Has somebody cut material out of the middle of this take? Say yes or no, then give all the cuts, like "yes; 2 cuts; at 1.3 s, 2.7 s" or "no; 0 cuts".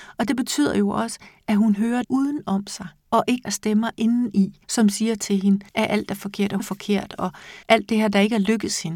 yes; 7 cuts; at 2.0 s, 3.0 s, 3.4 s, 4.6 s, 5.7 s, 6.6 s, 7.6 s